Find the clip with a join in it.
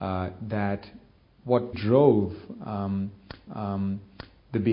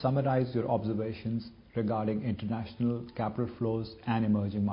first; 2 cuts; at 1.7 s, 3.5 s

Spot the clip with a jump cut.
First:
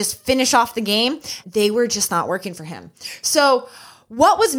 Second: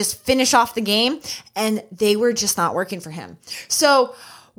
first; 1 cut; at 1.4 s

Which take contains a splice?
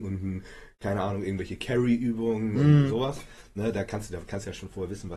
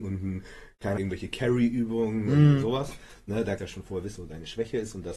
second; 3 cuts; at 1.0 s, 3.6 s, 4.2 s

